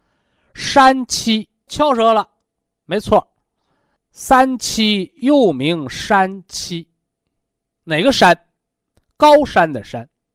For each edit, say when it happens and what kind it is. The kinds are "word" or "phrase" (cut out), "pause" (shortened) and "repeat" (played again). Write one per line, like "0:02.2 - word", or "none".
0:01.7 - word
0:04.0 - word